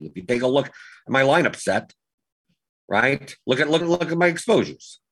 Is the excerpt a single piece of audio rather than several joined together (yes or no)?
no